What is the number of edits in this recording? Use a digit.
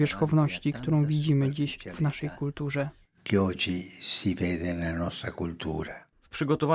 0